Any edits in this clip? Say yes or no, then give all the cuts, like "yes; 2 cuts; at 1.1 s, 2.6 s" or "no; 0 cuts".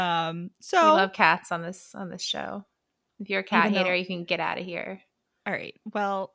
no; 0 cuts